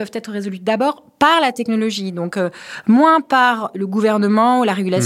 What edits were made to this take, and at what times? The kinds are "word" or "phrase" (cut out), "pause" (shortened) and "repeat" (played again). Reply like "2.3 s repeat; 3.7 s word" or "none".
none